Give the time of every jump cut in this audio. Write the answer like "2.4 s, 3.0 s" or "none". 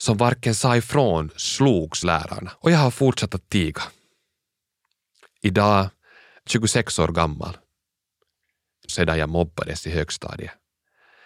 2.0 s, 2.6 s, 6.5 s, 8.9 s